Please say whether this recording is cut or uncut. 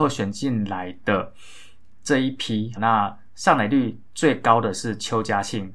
cut